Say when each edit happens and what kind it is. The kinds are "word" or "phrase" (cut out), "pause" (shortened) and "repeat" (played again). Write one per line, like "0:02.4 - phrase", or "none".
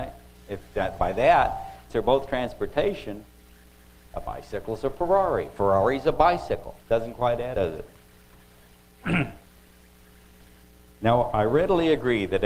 0:01.9 - word
0:06.8 - pause
0:07.5 - word
0:09.4 - pause